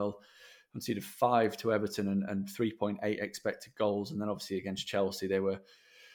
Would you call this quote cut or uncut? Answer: uncut